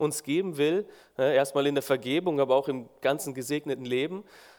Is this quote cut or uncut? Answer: uncut